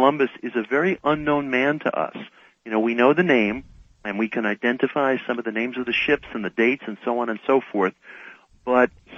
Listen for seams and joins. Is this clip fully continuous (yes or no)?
yes